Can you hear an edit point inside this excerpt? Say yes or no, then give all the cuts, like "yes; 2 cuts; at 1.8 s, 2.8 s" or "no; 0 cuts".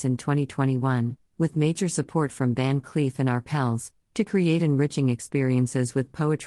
no; 0 cuts